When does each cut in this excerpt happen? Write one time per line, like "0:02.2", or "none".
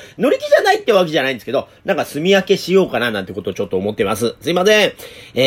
none